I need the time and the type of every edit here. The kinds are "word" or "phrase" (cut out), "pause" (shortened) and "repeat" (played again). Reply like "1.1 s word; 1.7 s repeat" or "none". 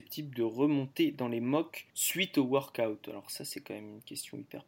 1.9 s pause